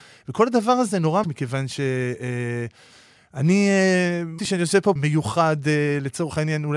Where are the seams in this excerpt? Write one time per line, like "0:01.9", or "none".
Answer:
0:01.2
0:04.4
0:05.0